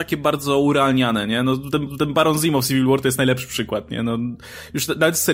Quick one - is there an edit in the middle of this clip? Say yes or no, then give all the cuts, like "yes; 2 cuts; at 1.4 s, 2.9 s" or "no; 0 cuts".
yes; 1 cut; at 1.9 s